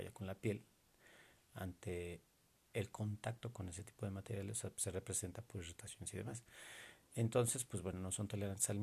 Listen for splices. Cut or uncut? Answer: uncut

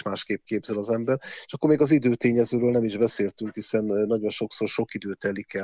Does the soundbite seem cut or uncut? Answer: uncut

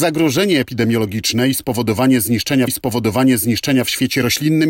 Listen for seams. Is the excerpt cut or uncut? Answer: cut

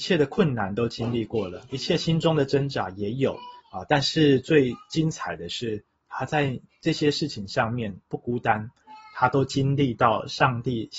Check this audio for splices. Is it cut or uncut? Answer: cut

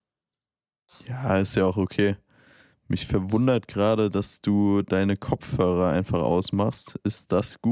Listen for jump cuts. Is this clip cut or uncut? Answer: uncut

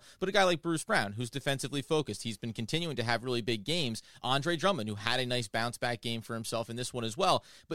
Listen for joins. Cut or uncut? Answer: uncut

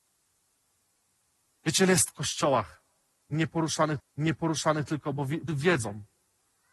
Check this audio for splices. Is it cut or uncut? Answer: cut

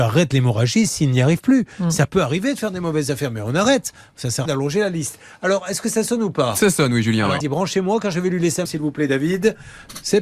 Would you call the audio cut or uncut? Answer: cut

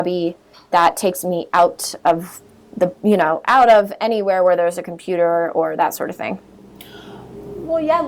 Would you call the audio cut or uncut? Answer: uncut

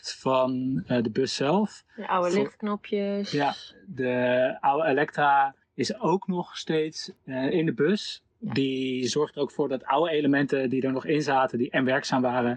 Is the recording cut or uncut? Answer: cut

